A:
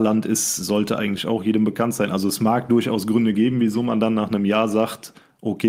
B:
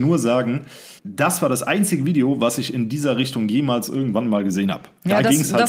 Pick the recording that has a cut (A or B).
B